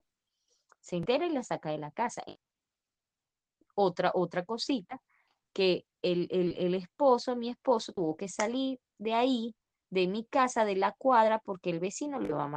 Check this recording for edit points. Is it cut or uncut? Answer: uncut